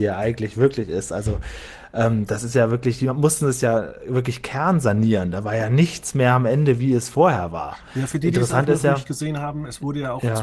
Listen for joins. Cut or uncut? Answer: uncut